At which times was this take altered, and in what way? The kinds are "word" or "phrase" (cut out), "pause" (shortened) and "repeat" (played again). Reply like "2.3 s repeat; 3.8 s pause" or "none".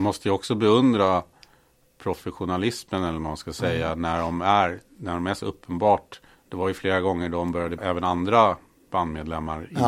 6.3 s pause; 7.8 s word